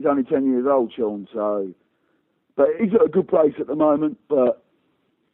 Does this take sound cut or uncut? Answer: cut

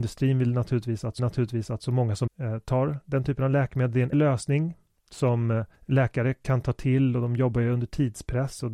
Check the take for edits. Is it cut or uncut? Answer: cut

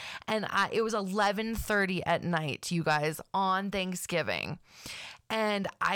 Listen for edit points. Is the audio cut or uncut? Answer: uncut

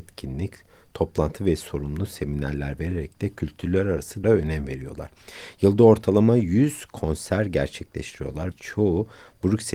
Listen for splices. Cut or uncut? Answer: cut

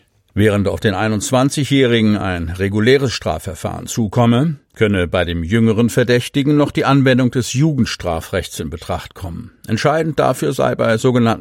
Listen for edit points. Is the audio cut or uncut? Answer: uncut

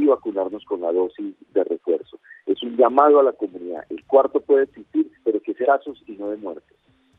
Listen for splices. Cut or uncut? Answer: cut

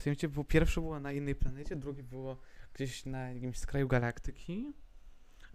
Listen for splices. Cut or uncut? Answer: uncut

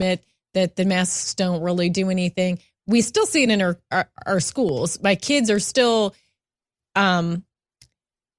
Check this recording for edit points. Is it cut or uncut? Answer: uncut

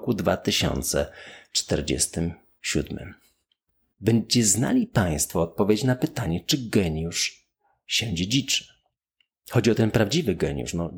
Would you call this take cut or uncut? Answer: uncut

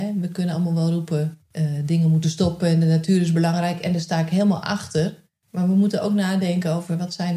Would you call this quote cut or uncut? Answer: uncut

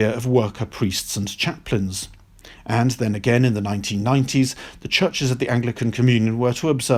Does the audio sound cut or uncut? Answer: uncut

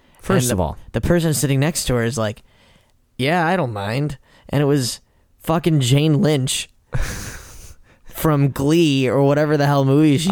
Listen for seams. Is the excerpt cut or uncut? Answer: uncut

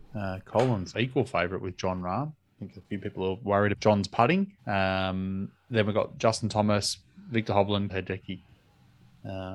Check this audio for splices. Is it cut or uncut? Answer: cut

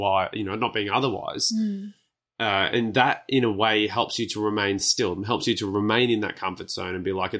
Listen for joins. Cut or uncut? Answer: uncut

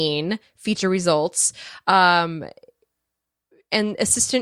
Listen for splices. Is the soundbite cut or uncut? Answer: uncut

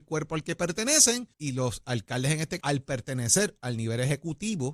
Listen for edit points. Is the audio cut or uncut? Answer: cut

